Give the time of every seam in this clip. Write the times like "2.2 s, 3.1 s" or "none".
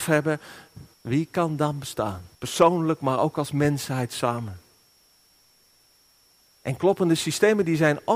0.9 s, 2.3 s